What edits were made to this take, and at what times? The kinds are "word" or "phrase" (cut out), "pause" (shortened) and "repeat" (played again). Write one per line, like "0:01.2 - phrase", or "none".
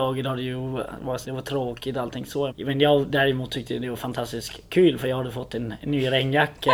0:01.2 - word
0:02.5 - word